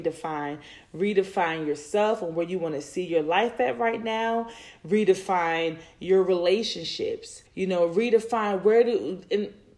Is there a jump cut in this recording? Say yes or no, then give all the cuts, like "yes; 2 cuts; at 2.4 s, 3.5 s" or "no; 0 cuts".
yes; 1 cut; at 7.5 s